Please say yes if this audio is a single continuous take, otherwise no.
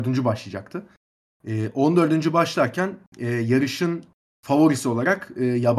yes